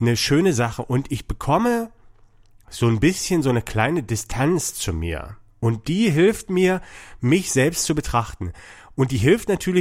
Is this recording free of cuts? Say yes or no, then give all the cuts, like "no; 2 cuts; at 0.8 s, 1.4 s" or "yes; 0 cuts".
yes; 0 cuts